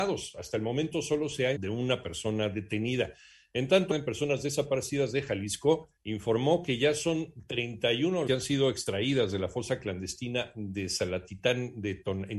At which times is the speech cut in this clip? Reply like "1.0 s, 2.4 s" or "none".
1.6 s, 3.9 s, 6.0 s, 8.3 s